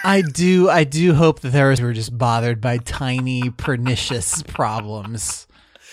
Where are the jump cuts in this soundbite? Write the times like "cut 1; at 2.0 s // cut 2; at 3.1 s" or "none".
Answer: cut 1; at 1.8 s